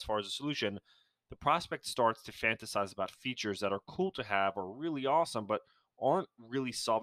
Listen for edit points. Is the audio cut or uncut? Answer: uncut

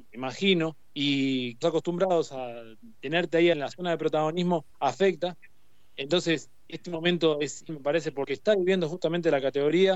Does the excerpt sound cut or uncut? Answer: cut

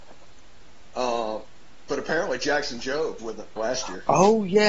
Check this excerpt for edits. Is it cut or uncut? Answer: cut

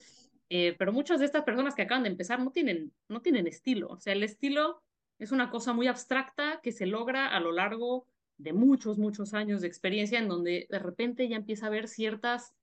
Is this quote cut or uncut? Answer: uncut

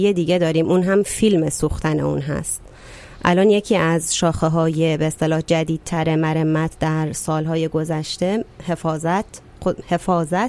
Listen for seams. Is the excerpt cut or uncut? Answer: uncut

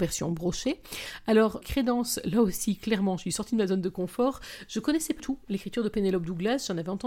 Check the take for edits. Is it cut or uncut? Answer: cut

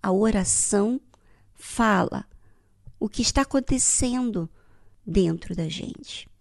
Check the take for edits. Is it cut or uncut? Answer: uncut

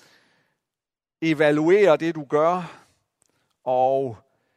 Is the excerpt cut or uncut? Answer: uncut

